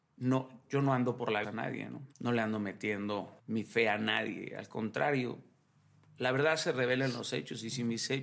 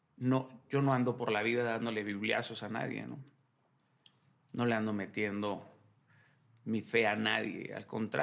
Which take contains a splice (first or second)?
first